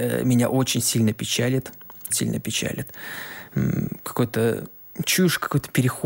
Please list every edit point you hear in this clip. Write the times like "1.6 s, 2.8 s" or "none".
2.1 s